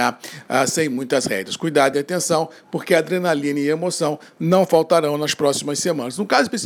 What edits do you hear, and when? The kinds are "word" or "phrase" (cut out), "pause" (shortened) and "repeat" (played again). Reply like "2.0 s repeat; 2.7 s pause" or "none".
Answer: none

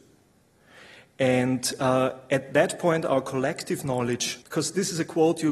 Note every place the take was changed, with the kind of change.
4.4 s phrase

